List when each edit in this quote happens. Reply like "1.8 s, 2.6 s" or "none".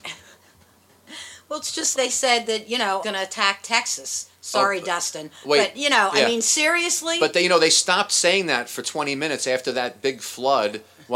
1.9 s, 3.0 s